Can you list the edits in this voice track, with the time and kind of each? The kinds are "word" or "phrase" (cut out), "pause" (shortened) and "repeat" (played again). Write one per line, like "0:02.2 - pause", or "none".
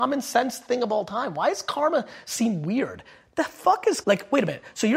0:04.0 - word